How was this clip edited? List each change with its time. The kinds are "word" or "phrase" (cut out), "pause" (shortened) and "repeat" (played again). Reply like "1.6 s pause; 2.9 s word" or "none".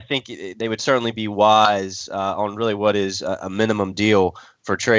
none